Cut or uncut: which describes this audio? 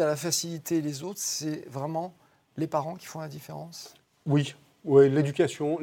uncut